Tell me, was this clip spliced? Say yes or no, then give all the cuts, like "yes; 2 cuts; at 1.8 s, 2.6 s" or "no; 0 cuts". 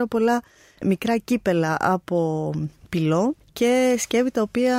no; 0 cuts